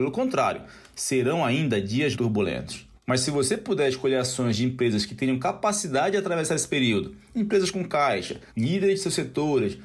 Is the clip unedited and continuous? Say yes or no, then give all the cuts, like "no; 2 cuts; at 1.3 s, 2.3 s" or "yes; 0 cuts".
no; 3 cuts; at 2.1 s, 3.0 s, 8.5 s